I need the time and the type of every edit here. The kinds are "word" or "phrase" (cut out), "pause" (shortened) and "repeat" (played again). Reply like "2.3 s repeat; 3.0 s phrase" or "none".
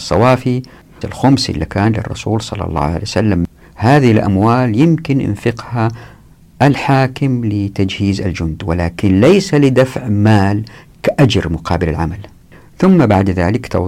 1.0 s phrase